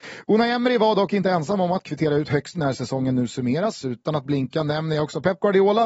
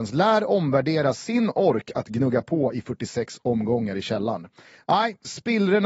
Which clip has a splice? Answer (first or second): first